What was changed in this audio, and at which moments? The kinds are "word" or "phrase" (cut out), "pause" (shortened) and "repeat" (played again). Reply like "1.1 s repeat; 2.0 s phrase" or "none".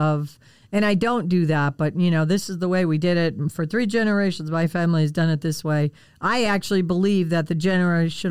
none